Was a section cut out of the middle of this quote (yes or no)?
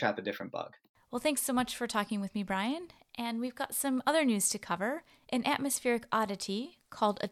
no